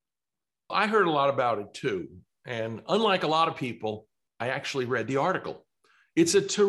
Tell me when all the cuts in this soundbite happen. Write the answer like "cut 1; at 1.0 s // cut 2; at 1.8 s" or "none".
none